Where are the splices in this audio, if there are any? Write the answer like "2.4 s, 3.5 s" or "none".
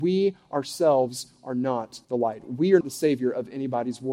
2.0 s, 2.8 s